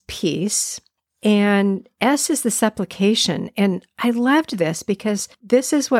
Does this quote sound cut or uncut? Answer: uncut